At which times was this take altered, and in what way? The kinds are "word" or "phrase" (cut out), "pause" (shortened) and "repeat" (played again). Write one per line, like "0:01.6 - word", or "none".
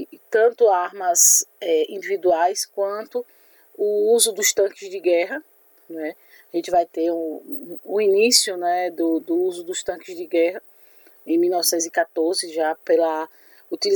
none